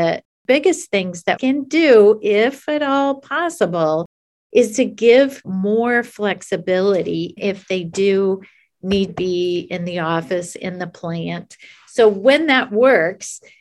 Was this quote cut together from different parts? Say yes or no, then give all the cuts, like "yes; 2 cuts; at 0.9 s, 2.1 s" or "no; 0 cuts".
yes; 4 cuts; at 1.4 s, 5.4 s, 7.4 s, 9.1 s